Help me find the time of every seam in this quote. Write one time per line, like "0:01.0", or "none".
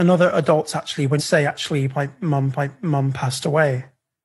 0:01.2
0:02.5